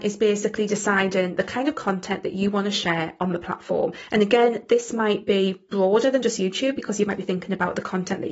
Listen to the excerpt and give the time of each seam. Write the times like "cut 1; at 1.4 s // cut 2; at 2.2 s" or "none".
none